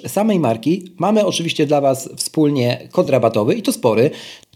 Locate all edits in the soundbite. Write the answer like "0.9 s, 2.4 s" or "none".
none